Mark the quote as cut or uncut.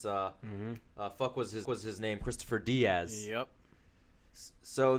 cut